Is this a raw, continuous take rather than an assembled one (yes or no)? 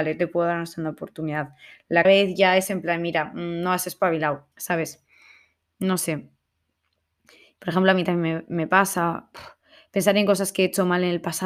no